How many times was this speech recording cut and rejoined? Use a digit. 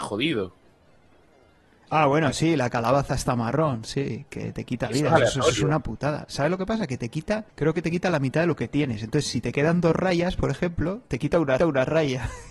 2